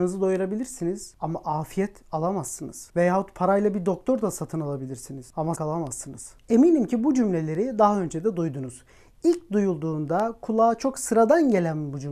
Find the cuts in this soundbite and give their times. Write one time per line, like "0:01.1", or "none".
0:05.5